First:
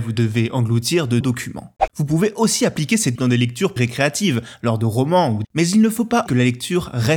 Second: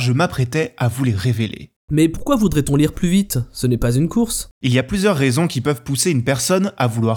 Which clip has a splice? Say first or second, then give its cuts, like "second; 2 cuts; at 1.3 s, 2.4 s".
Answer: first; 5 cuts; at 1.2 s, 3.1 s, 3.8 s, 5.4 s, 6.3 s